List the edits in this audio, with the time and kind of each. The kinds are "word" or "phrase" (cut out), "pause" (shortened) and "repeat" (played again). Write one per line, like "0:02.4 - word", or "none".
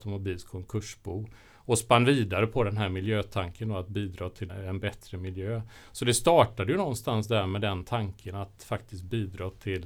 0:04.5 - word